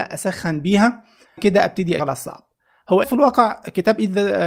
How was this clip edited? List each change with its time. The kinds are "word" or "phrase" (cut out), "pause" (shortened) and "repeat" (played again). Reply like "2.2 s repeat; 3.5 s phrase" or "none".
1.4 s word; 2.0 s word; 3.0 s word